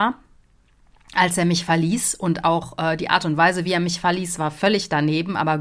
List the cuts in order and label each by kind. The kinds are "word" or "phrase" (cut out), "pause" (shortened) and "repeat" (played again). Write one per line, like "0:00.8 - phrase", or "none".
none